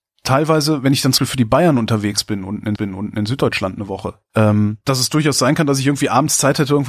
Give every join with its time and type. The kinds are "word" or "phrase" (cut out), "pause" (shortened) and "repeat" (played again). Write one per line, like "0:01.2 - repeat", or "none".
0:01.2 - word
0:02.8 - repeat
0:04.3 - word
0:04.8 - pause